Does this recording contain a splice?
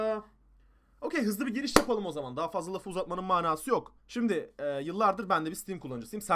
yes; 1 cut; at 4.0 s

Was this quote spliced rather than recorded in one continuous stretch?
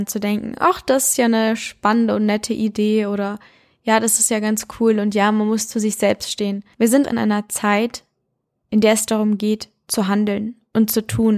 yes; 1 cut; at 7.0 s

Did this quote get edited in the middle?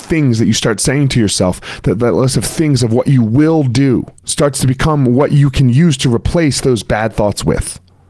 yes; 1 cut; at 4.2 s

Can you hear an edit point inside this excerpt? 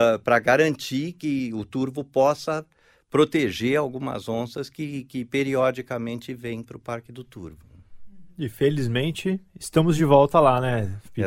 no; 0 cuts

